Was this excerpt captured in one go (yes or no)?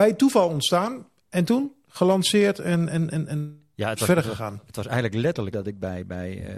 no